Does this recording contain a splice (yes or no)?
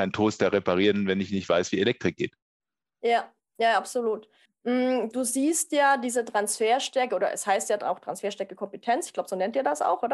yes